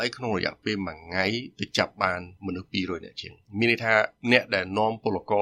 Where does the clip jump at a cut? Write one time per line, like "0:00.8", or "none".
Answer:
0:02.4